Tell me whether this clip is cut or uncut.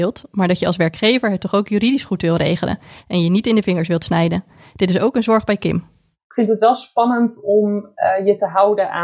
uncut